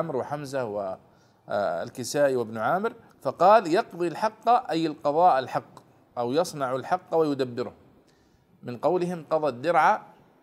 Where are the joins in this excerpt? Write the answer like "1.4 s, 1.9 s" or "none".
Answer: 3.1 s